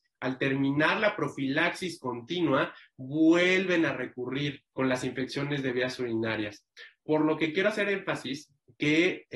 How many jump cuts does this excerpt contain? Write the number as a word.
one